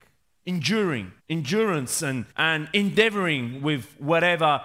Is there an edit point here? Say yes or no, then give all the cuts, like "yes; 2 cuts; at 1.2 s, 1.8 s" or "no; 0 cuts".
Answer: yes; 2 cuts; at 1.2 s, 2.3 s